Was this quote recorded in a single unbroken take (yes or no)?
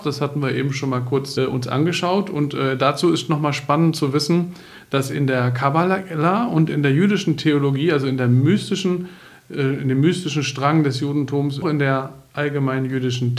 no